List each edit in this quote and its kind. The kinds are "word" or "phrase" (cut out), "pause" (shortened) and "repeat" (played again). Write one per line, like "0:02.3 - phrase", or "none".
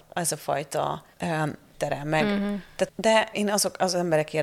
0:01.1 - pause
0:01.7 - phrase
0:02.9 - word
0:03.3 - word